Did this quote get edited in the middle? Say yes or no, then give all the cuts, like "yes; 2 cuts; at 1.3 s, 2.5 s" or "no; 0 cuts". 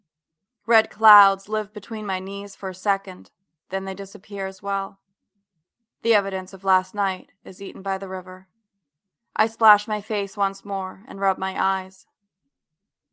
no; 0 cuts